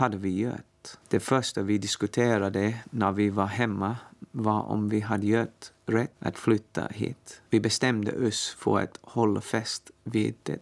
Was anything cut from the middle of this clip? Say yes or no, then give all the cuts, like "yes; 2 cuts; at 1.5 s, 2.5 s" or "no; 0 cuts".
yes; 2 cuts; at 1.0 s, 7.5 s